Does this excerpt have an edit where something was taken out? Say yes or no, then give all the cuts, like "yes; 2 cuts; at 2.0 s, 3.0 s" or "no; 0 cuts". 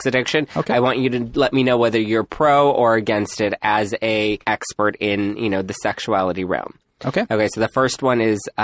yes; 1 cut; at 4.4 s